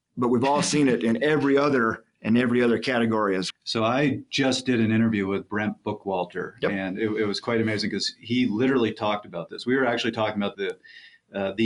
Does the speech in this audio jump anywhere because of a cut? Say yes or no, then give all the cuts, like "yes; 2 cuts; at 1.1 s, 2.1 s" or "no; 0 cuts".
yes; 2 cuts; at 3.5 s, 10.5 s